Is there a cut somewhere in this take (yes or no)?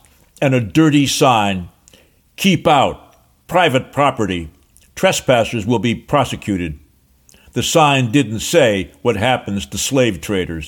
no